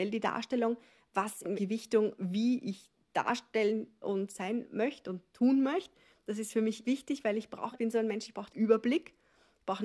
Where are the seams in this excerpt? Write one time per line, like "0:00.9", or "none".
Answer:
0:01.6
0:04.0
0:06.8
0:07.7
0:08.5